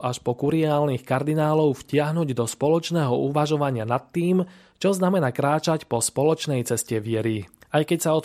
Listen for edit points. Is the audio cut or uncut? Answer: uncut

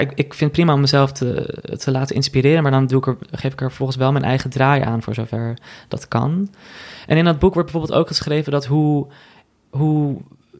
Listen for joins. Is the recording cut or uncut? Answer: uncut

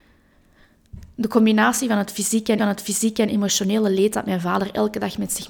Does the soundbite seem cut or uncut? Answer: cut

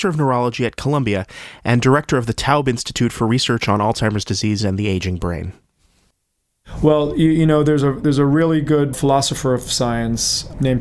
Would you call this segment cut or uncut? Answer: cut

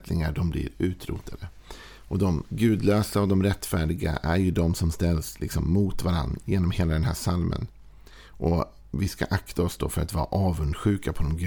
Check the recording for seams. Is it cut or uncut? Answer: uncut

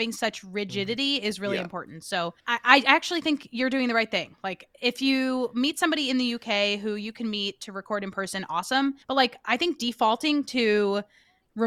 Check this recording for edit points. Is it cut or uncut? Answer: cut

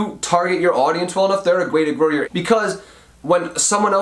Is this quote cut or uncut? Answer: cut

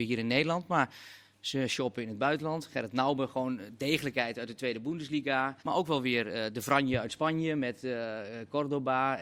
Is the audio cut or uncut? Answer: cut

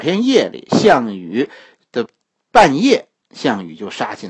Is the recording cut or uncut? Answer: uncut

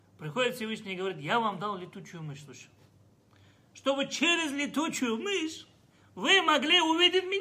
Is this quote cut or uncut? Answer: uncut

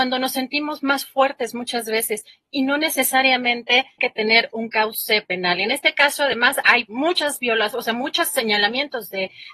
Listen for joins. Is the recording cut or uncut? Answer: cut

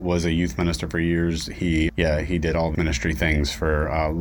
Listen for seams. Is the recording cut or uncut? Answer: cut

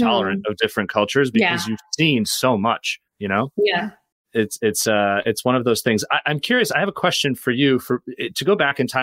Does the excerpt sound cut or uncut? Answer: cut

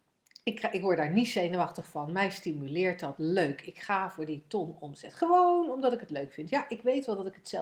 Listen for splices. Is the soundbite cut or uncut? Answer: uncut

